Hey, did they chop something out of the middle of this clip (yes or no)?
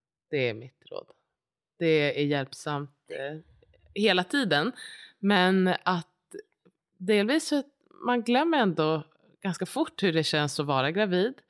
no